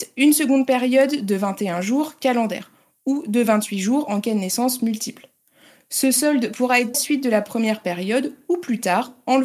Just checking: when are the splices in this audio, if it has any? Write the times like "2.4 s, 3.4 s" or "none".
6.9 s